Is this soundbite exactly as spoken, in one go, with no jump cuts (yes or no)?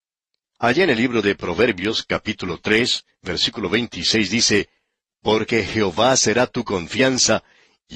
yes